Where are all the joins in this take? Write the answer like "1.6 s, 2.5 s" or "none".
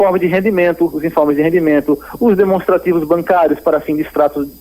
none